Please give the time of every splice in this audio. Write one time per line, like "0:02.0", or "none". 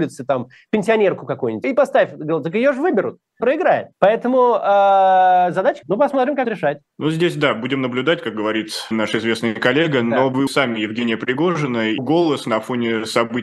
0:01.6
0:03.4
0:03.9
0:05.8
0:06.4
0:06.9
0:08.9
0:10.5
0:12.0